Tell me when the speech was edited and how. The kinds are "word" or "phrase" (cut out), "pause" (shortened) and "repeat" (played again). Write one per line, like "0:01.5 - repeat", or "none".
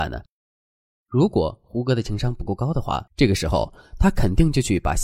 0:03.1 - pause